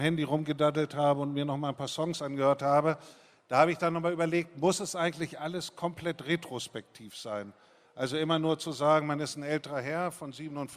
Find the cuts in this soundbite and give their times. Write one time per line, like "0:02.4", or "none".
none

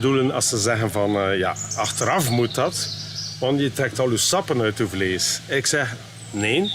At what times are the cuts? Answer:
none

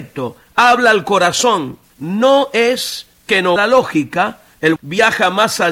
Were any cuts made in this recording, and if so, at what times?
0:01.9
0:03.6
0:04.8

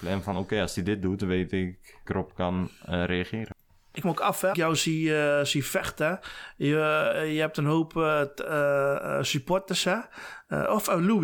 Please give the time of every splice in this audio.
0:02.1
0:04.0
0:04.5

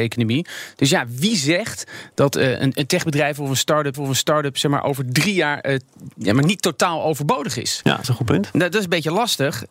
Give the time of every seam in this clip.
0:03.9
0:08.0

